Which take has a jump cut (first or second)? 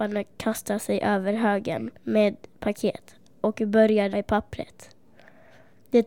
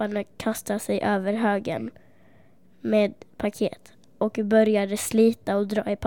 first